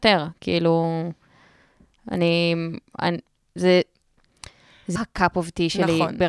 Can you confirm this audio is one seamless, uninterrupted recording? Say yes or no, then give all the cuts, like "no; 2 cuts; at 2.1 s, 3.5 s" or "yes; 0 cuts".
no; 1 cut; at 5.0 s